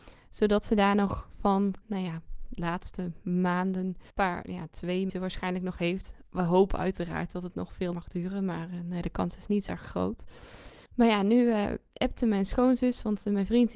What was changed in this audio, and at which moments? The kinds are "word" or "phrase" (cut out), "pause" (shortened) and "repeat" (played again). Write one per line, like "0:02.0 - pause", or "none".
0:01.8 - phrase
0:04.1 - pause
0:05.1 - phrase
0:07.9 - word
0:09.7 - word
0:10.9 - pause